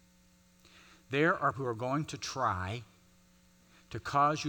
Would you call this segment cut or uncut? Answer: cut